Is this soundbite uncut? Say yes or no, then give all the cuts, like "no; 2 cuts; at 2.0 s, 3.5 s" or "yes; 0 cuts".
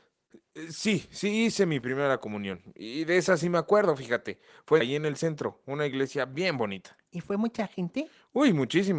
no; 1 cut; at 4.8 s